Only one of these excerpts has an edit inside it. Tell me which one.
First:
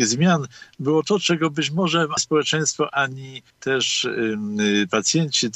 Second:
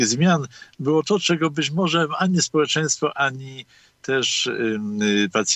first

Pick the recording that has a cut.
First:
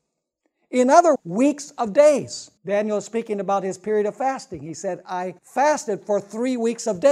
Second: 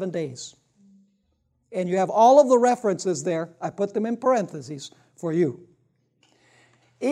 first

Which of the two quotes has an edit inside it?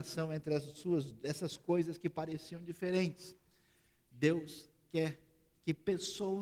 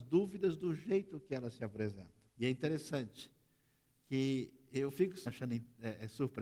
second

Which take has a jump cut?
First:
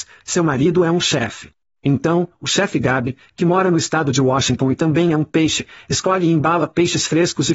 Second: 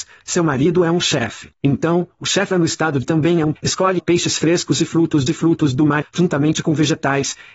second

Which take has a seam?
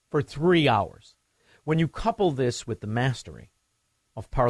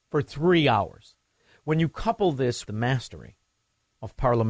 second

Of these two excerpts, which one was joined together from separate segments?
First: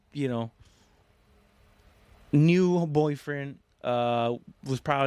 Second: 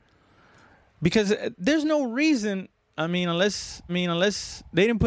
second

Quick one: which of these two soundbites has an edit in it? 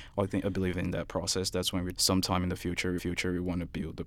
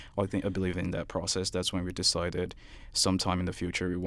first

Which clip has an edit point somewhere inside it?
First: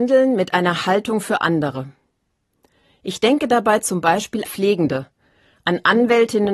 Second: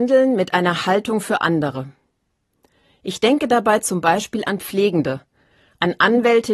first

